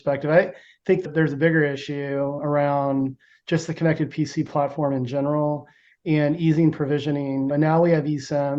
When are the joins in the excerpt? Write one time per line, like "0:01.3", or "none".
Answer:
none